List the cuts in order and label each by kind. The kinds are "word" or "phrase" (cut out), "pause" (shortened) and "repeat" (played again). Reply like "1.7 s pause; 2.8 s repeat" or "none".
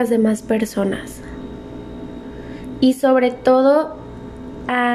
none